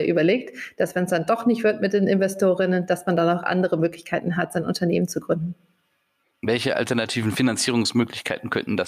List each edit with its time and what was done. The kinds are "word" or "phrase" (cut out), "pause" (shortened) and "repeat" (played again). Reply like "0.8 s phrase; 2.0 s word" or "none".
none